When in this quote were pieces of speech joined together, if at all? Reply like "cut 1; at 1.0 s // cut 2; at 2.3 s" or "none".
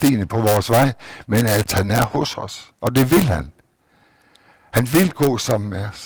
none